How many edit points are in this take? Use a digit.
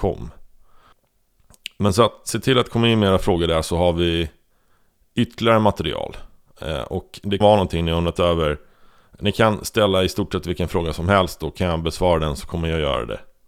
1